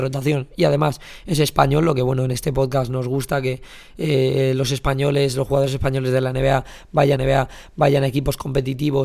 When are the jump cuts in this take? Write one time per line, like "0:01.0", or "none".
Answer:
0:07.2